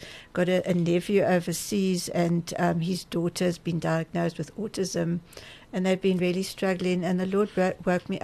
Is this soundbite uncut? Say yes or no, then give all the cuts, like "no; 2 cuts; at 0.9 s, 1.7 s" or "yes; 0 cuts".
yes; 0 cuts